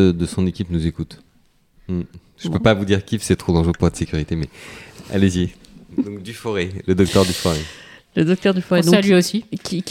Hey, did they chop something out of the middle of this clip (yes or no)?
yes